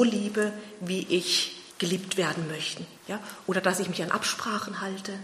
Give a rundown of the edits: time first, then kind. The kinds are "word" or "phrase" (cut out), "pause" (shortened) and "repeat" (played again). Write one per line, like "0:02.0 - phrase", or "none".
0:01.7 - pause
0:03.0 - pause

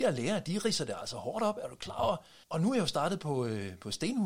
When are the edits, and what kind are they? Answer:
0:02.4 - pause

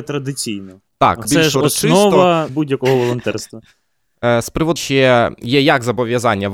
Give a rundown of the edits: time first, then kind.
0:01.2 - word
0:02.5 - word
0:04.8 - word

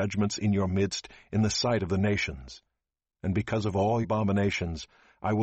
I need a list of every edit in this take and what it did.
0:04.0 - word

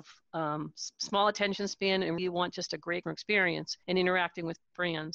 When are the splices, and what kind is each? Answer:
0:02.2 - word
0:03.0 - word
0:03.8 - pause

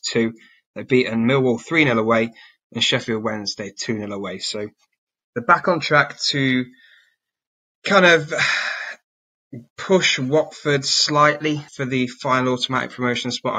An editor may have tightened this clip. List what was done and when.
0:11.7 - pause

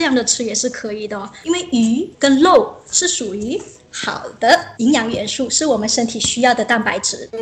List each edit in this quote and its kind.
0:02.1 - pause

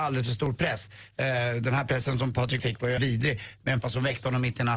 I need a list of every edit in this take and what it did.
0:02.6 - word
0:03.0 - word
0:03.8 - word

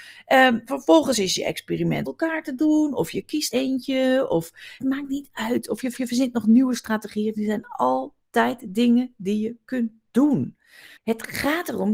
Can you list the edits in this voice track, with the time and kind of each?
0:02.1 - phrase
0:03.5 - word
0:04.8 - phrase
0:05.9 - repeat
0:11.0 - pause

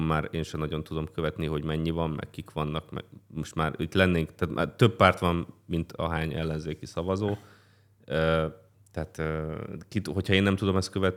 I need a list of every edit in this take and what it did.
0:08.7 - pause

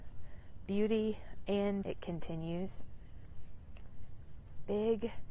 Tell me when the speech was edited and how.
0:01.8 - word

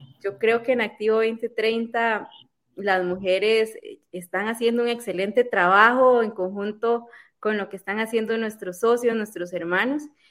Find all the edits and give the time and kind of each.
none

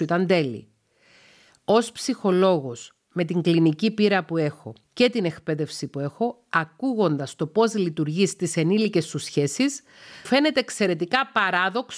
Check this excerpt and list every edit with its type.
0:04.8 - pause
0:10.2 - word

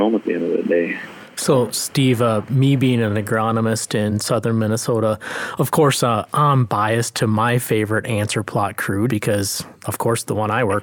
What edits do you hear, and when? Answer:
0:09.1 - word

